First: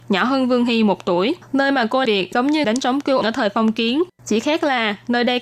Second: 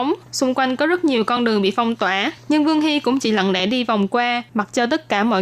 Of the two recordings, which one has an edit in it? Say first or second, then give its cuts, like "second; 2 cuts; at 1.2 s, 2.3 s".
first; 3 cuts; at 2.1 s, 2.6 s, 3.2 s